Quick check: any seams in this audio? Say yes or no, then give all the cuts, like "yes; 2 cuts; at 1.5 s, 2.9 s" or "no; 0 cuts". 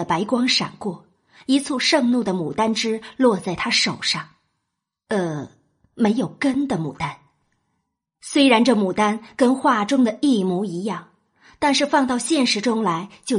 no; 0 cuts